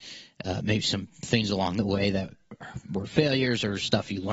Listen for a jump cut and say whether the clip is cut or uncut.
uncut